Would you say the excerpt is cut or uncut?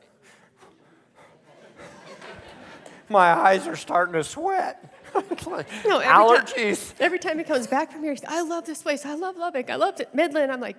cut